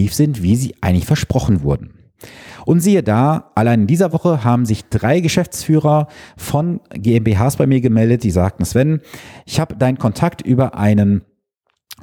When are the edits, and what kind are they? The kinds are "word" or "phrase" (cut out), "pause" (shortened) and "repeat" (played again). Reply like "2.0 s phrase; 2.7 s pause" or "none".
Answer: none